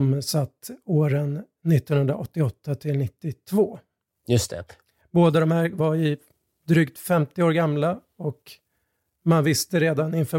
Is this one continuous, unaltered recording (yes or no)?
yes